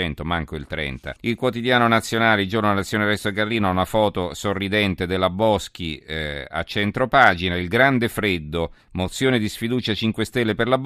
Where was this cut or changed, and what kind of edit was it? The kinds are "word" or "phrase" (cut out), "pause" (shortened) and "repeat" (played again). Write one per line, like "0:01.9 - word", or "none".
0:01.2 - pause
0:08.8 - pause

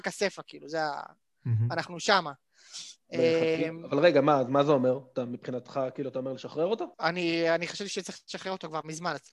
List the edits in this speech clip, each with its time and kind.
0:06.9 - pause

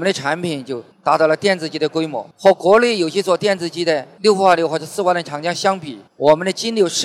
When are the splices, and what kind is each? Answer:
0:00.9 - pause
0:02.3 - pause
0:06.1 - pause

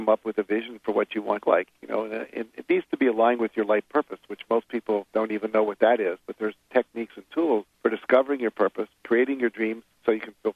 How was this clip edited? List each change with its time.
0:01.4 - phrase
0:05.1 - pause
0:07.7 - pause
0:08.9 - pause

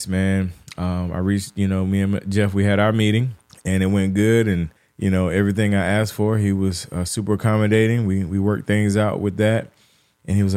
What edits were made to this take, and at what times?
0:03.5 - pause
0:04.8 - pause

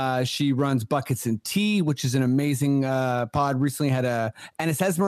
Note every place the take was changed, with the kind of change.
none

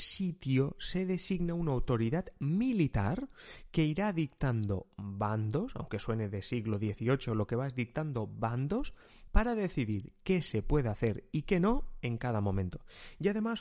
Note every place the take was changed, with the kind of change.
none

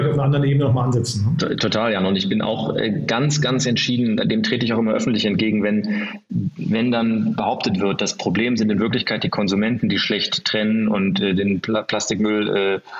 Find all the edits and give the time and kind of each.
none

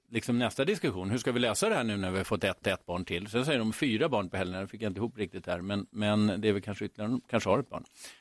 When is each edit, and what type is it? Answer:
0:02.6 - repeat

